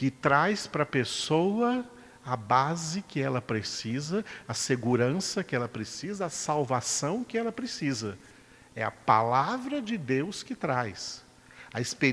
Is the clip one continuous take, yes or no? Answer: yes